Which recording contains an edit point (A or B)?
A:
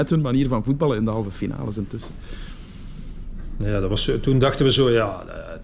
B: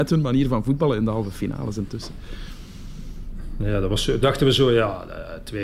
B